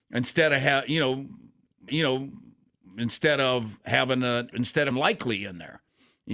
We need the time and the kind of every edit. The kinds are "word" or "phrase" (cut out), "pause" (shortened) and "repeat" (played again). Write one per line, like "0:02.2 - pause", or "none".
0:01.9 - repeat
0:04.5 - word
0:04.9 - word

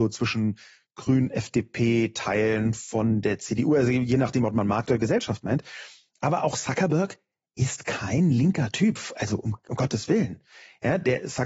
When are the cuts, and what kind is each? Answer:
none

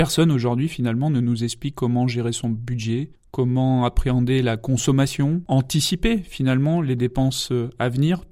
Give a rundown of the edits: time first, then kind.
0:05.5 - word

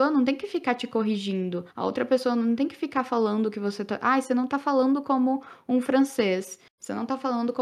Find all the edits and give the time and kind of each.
0:01.7 - pause

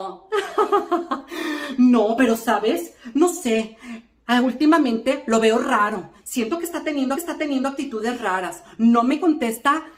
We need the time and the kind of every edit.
0:07.1 - repeat

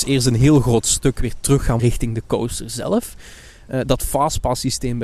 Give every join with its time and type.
0:01.8 - word

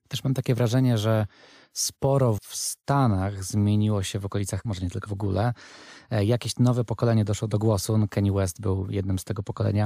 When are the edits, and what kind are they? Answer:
0:02.4 - word
0:04.6 - word
0:05.1 - phrase

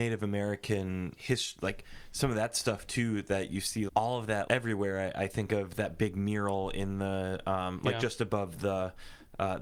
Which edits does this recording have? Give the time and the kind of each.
0:01.2 - word
0:03.9 - word
0:04.5 - word

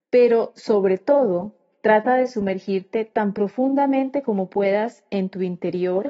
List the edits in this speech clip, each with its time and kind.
none

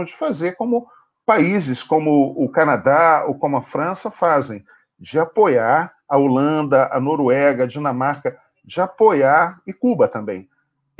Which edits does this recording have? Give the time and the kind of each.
none

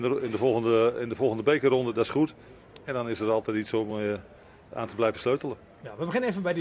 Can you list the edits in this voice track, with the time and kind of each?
none

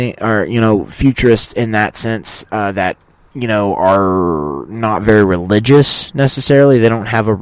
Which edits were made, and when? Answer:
none

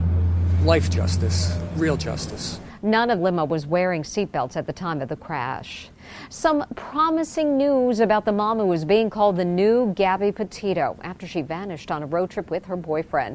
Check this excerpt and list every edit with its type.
0:03.2 - phrase

